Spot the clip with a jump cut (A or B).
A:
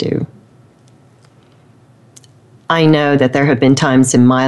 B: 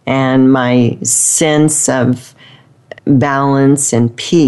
B